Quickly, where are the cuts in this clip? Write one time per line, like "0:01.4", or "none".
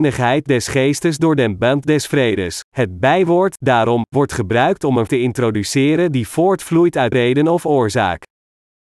0:02.7
0:05.1
0:07.1

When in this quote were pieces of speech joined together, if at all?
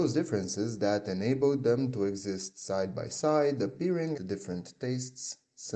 0:04.1

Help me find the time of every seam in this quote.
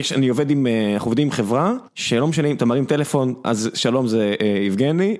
0:01.9

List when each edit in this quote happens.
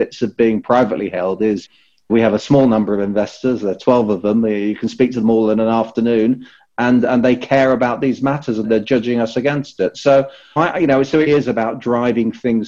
0:08.6
0:10.6
0:11.3

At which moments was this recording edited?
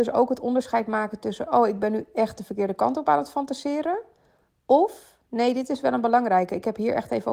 none

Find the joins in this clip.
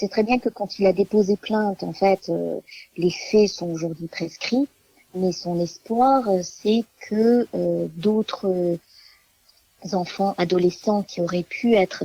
none

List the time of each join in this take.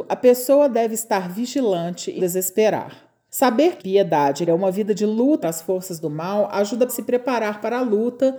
0:02.2
0:03.8
0:04.5
0:05.4
0:06.9

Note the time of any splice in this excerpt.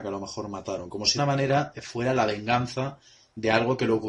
0:01.2

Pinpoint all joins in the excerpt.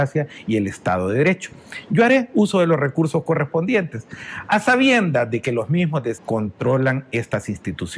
0:06.2

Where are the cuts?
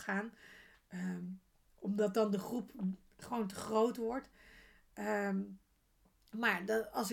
none

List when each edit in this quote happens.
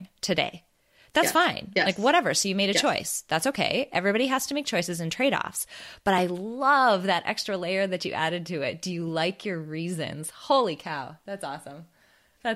none

